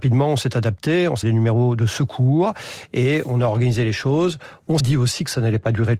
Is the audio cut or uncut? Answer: cut